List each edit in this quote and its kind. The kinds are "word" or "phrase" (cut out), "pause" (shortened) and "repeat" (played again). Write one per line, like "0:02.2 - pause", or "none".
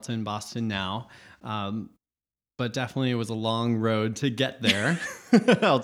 none

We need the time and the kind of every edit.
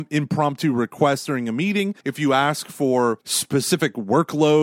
0:02.0 - pause
0:03.2 - pause

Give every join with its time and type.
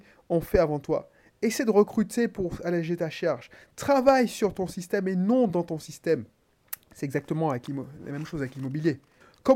none

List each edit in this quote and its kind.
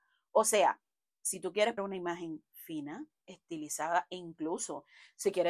0:01.8 - word
0:03.2 - word

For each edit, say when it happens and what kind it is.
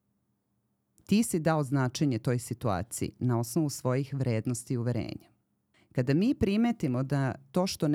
0:05.7 - pause

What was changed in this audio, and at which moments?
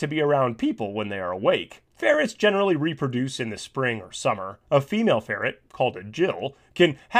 0:01.9 - pause
0:04.6 - pause

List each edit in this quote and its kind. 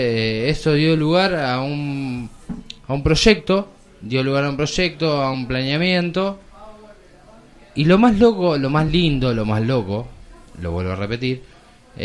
none

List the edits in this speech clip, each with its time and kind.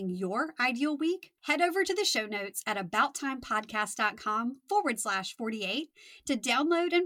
0:01.4 - pause

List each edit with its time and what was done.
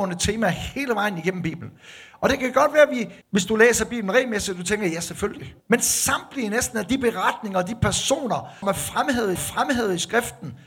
0:03.2 - pause
0:05.6 - pause
0:08.6 - word
0:09.4 - repeat

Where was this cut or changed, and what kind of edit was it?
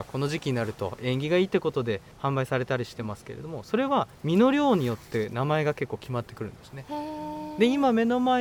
0:02.1 - pause
0:04.1 - pause

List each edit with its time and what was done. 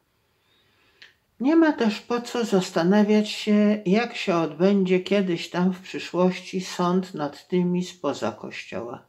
0:01.3 - pause

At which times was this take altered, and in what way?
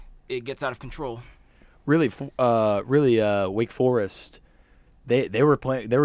none

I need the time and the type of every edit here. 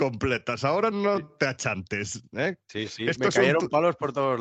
none

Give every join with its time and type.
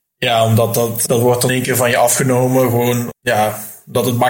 0:01.1 - word
0:01.5 - word
0:03.1 - word

